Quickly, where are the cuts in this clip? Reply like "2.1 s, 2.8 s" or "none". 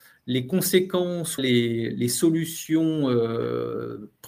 1.4 s